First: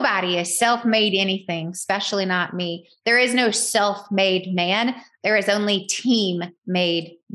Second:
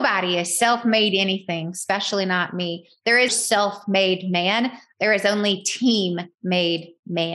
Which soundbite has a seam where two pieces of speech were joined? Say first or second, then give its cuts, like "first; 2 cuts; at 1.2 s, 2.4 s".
second; 1 cut; at 3.3 s